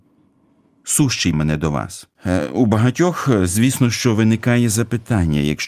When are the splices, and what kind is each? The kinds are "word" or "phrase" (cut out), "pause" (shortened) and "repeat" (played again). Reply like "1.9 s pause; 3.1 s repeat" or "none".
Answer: 1.3 s word; 2.1 s pause